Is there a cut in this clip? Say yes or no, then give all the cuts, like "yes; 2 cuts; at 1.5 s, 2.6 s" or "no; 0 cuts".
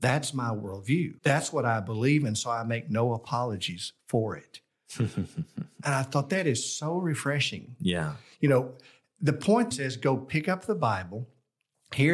yes; 2 cuts; at 1.2 s, 9.7 s